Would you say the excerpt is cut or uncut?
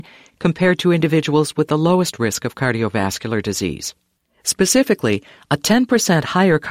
uncut